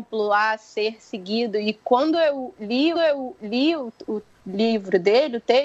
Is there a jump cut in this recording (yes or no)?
yes